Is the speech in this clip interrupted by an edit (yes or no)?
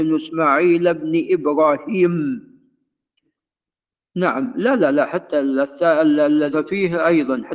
yes